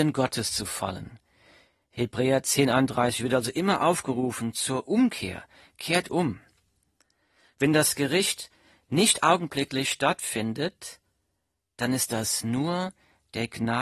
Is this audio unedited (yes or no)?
yes